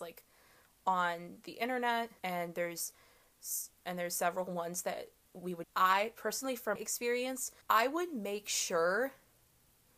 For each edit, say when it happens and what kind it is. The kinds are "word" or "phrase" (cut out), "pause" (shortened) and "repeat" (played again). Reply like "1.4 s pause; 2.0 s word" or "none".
2.2 s pause; 5.6 s word; 6.8 s word; 7.6 s pause

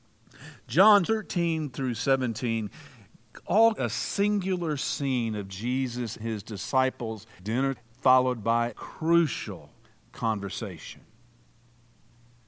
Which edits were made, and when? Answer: 1.1 s word; 3.8 s word; 6.2 s word; 7.4 s word; 7.8 s word; 8.7 s word

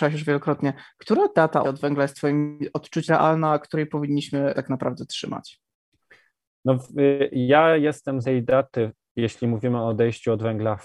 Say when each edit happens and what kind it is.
1.6 s word; 3.1 s word; 4.5 s word; 8.2 s word

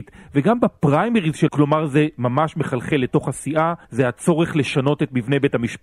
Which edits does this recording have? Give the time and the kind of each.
1.5 s word; 3.8 s pause

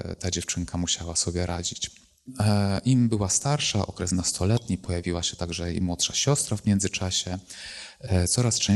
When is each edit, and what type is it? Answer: none

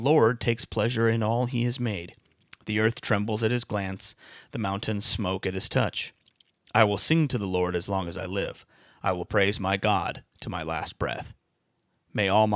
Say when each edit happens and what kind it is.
none

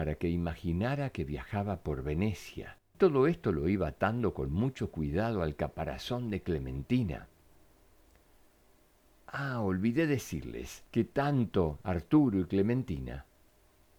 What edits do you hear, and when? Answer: 2.9 s pause

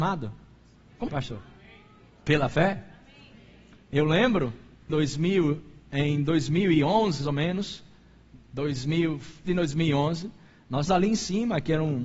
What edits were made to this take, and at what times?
1.1 s word; 4.9 s word; 7.2 s word; 9.4 s word; 10.9 s word

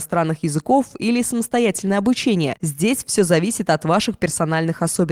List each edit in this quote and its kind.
none

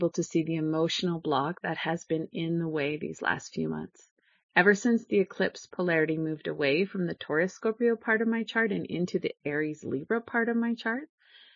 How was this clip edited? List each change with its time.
none

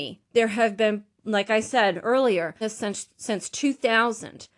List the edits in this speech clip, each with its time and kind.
2.6 s phrase

